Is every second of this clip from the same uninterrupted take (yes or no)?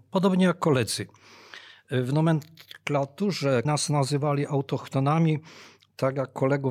no